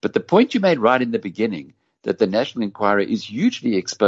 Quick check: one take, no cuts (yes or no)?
yes